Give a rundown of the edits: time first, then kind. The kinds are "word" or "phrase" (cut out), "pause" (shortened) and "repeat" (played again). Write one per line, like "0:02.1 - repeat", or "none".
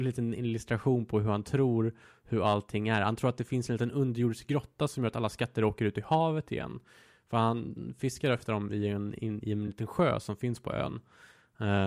none